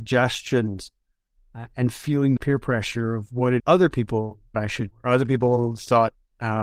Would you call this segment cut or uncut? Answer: cut